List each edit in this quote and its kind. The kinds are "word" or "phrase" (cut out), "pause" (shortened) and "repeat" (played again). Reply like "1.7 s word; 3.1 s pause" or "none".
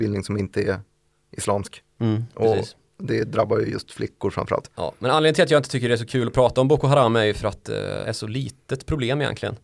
8.0 s word